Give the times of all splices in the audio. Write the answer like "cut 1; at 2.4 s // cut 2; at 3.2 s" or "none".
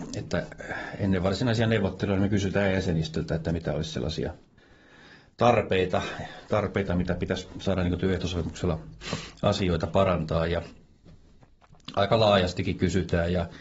none